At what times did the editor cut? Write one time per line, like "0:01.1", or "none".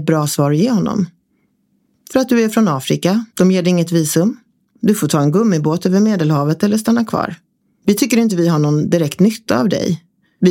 0:03.3